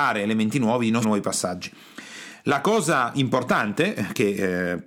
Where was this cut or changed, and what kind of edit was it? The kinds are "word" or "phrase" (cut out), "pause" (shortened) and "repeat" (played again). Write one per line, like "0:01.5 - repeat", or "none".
0:01.0 - word
0:03.1 - word